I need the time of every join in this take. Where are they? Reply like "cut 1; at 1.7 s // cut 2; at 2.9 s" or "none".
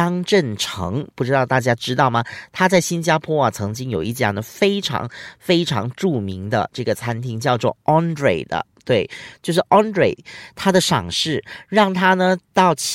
none